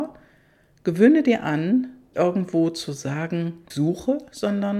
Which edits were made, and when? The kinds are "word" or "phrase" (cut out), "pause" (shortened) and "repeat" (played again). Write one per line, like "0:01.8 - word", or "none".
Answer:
0:02.1 - word
0:03.7 - word